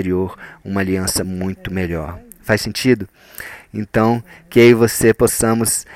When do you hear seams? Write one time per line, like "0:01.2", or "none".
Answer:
none